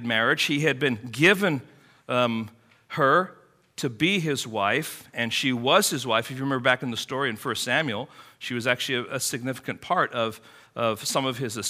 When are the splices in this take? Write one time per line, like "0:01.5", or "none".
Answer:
none